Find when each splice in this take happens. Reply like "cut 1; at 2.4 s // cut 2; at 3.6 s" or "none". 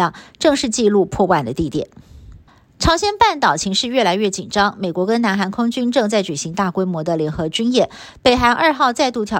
cut 1; at 2.5 s